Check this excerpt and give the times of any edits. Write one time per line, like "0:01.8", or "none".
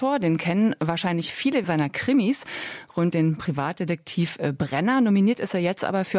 0:01.6
0:03.1